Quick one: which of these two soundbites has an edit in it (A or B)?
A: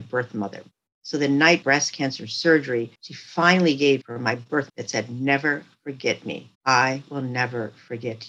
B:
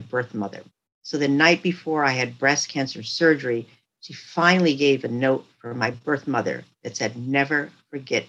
A